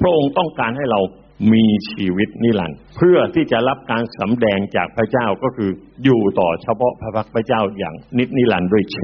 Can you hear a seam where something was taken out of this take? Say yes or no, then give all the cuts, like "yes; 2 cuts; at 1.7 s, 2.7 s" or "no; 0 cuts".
yes; 1 cut; at 2.9 s